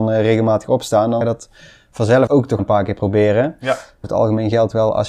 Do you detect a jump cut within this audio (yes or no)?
yes